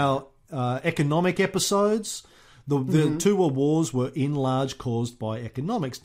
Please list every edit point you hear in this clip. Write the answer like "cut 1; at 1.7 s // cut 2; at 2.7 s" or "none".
none